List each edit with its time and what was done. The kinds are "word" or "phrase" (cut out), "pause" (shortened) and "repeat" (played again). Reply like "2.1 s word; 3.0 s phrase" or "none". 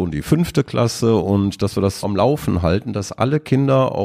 2.0 s word